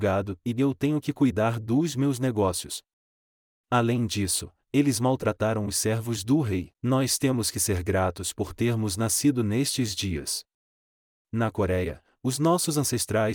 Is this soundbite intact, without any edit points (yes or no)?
no